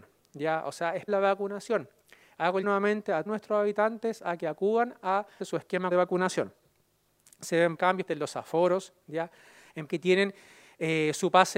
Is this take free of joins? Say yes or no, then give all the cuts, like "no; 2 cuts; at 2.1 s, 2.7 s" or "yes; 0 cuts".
no; 8 cuts; at 1.1 s, 2.6 s, 3.3 s, 5.4 s, 5.9 s, 7.7 s, 8.1 s, 9.9 s